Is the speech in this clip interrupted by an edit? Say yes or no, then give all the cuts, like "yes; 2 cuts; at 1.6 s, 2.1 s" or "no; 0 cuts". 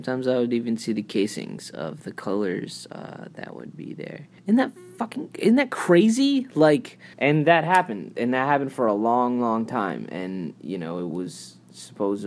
yes; 2 cuts; at 4.4 s, 7.1 s